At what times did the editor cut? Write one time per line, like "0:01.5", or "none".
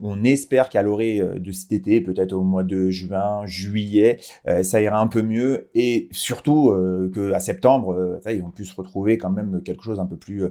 none